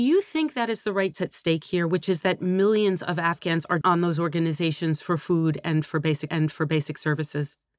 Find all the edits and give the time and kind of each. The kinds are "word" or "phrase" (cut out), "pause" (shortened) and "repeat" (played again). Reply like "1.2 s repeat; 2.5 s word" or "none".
1.1 s phrase; 3.8 s word; 6.3 s repeat